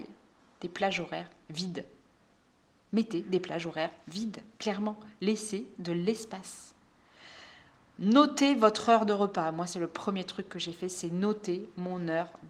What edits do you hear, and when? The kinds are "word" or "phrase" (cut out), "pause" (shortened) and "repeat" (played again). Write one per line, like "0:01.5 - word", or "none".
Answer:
none